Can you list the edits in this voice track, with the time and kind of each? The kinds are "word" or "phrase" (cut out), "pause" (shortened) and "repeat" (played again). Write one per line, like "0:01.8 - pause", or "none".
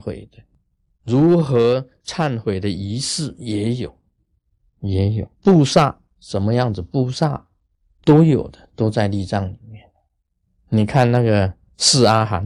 0:05.3 - pause